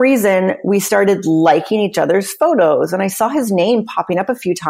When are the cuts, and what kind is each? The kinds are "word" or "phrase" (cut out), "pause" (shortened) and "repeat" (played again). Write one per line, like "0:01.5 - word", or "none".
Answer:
none